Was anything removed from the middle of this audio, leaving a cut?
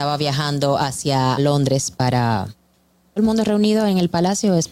yes; 2 cuts; at 1.4 s, 3.2 s

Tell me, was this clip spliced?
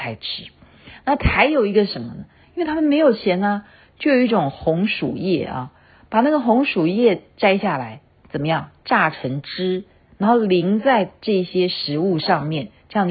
no; 0 cuts

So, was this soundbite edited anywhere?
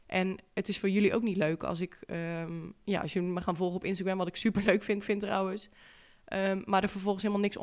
yes; 1 cut; at 5.0 s

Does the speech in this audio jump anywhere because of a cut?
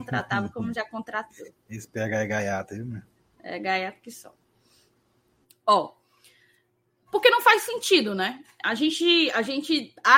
no; 0 cuts

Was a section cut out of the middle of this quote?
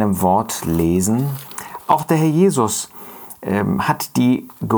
no; 0 cuts

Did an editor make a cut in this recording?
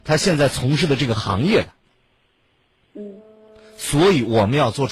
no; 0 cuts

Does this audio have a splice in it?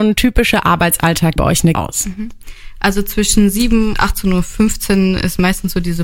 yes; 3 cuts; at 1.4 s, 1.7 s, 3.9 s

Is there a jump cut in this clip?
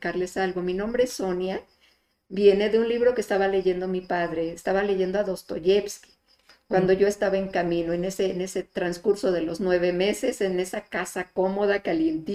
no; 0 cuts

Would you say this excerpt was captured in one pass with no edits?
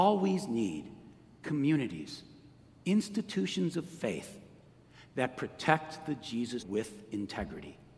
no; 1 cut; at 6.6 s

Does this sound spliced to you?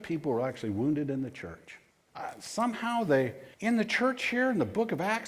yes; 2 cuts; at 1.9 s, 3.5 s

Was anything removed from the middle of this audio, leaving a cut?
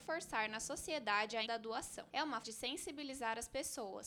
yes; 2 cuts; at 1.5 s, 2.4 s

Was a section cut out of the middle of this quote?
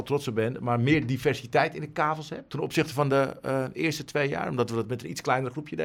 yes; 1 cut; at 2.5 s

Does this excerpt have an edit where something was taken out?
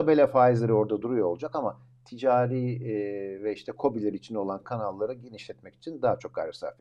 no; 0 cuts

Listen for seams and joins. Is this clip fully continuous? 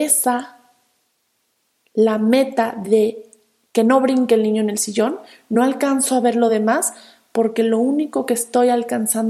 yes; 0 cuts

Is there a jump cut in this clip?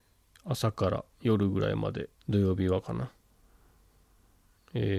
yes; 2 cuts; at 1.1 s, 2.2 s

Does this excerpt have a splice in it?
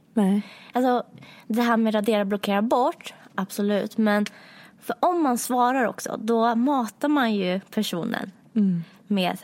no; 0 cuts

